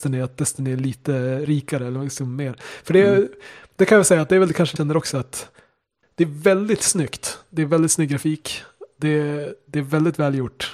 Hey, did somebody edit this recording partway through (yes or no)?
yes